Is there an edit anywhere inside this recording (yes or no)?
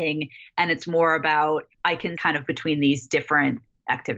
yes